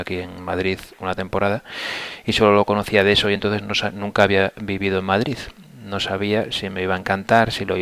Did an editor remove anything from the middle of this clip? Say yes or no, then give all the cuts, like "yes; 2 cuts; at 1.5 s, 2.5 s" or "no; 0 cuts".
no; 0 cuts